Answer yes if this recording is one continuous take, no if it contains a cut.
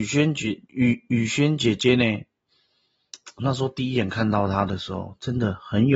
no